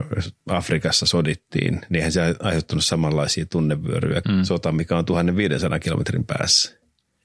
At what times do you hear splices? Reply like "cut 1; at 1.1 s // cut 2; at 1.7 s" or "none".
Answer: cut 1; at 4.2 s

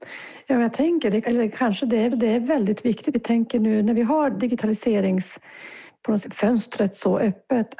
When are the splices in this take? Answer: cut 1; at 1.2 s // cut 2; at 2.1 s // cut 3; at 3.1 s // cut 4; at 6.2 s

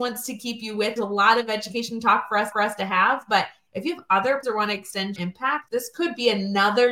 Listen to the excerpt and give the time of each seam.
cut 1; at 1.0 s // cut 2; at 2.5 s // cut 3; at 4.4 s // cut 4; at 5.2 s // cut 5; at 5.7 s

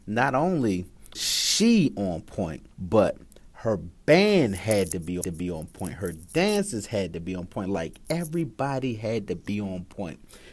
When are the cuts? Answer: cut 1; at 1.1 s // cut 2; at 2.7 s // cut 3; at 5.2 s

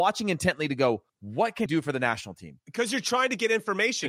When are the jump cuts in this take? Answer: cut 1; at 1.1 s // cut 2; at 1.7 s

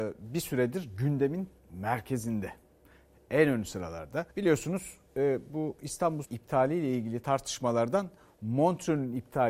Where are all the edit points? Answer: cut 1; at 1.6 s // cut 2; at 4.3 s // cut 3; at 6.2 s

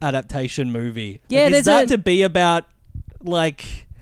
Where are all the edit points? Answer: cut 1; at 1.2 s // cut 2; at 1.9 s

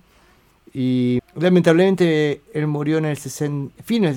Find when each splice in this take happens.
cut 1; at 1.2 s // cut 2; at 2.5 s

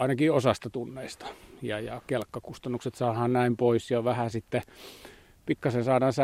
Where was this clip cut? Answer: none

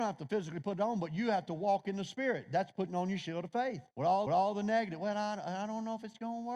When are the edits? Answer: cut 1; at 3.9 s // cut 2; at 4.3 s

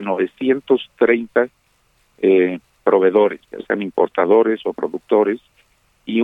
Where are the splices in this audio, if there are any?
cut 1; at 3.4 s

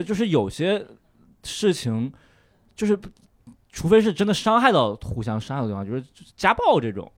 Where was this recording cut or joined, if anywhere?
none

